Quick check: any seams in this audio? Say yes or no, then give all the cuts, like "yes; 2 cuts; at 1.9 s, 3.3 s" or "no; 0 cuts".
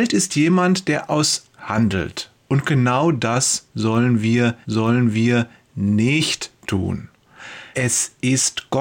yes; 4 cuts; at 1.5 s, 2.4 s, 4.6 s, 7.7 s